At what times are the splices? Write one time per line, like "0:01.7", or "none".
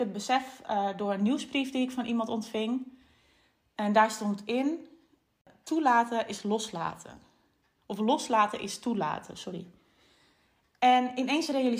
none